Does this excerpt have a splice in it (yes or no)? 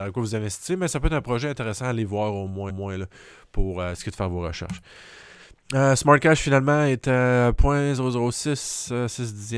yes